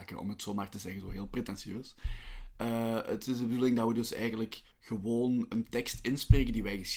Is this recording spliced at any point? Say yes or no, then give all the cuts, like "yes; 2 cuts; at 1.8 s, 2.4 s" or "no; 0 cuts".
yes; 1 cut; at 4.7 s